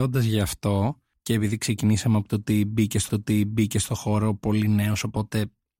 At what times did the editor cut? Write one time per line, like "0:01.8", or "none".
0:03.1